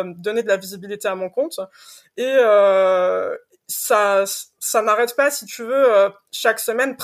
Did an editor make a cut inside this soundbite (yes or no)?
no